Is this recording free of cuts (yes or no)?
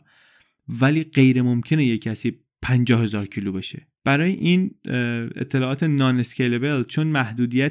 no